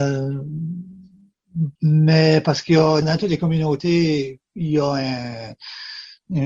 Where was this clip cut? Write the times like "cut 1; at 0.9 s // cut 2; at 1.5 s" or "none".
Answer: cut 1; at 1.8 s // cut 2; at 3.0 s // cut 3; at 4.5 s